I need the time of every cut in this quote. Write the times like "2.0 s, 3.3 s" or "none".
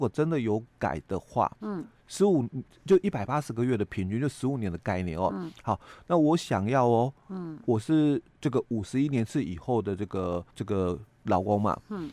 8.3 s, 10.5 s